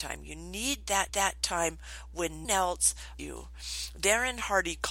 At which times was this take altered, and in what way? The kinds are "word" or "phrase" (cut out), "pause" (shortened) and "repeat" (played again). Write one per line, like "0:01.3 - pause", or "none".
0:01.1 - repeat
0:02.4 - word
0:03.2 - word